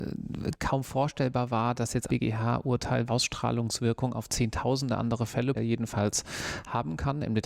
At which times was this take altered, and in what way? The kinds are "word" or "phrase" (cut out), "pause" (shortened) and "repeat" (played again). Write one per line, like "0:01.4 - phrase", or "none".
0:02.1 - word
0:03.1 - word
0:05.5 - word